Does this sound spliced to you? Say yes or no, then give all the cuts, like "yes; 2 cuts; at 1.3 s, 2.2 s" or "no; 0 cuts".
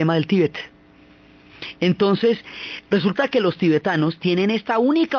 no; 0 cuts